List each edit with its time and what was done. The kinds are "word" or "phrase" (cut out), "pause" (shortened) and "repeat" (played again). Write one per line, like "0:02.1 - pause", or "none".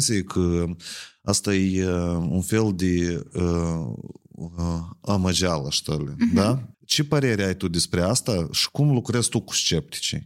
0:06.7 - pause